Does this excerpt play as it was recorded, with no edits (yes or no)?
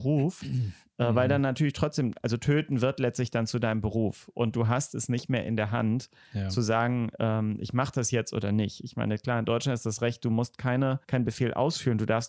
no